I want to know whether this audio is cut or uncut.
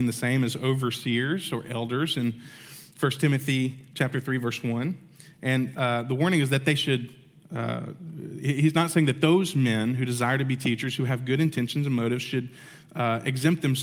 uncut